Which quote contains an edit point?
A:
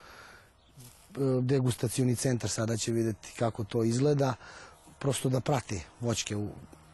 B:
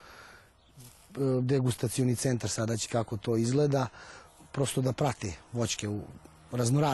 B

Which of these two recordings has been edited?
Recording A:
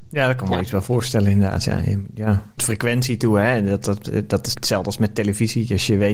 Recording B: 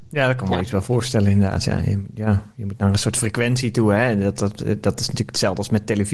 A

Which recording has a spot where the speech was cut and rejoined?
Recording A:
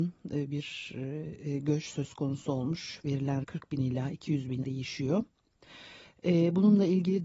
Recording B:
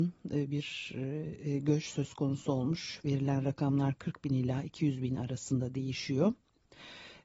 A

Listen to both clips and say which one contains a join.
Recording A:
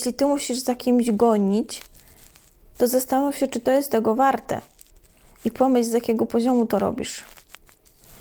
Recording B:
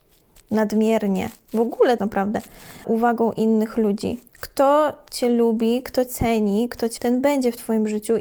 B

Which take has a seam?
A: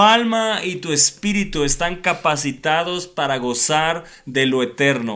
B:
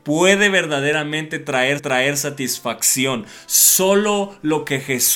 B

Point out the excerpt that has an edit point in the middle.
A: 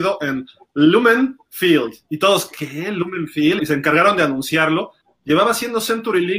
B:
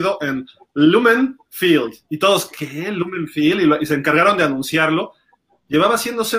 A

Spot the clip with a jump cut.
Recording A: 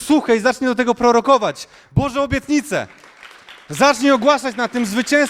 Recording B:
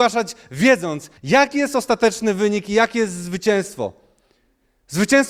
B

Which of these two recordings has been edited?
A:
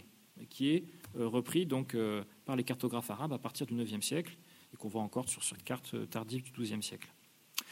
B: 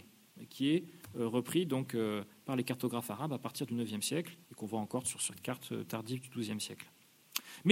B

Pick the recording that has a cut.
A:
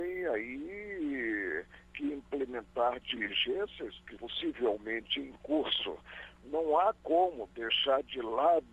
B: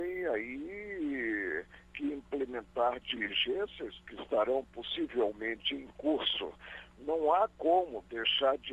A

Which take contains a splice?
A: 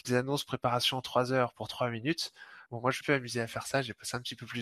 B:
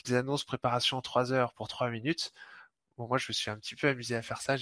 A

